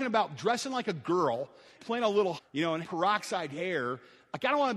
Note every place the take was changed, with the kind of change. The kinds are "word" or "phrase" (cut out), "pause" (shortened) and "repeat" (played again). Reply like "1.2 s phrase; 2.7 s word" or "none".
1.8 s word; 2.4 s word; 2.8 s word